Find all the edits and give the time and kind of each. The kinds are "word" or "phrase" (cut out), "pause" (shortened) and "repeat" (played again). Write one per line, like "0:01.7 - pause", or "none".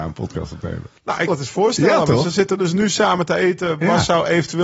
0:01.3 - word